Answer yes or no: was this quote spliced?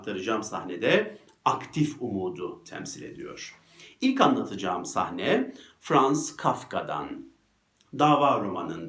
no